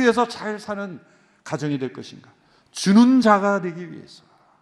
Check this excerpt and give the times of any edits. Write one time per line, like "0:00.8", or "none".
none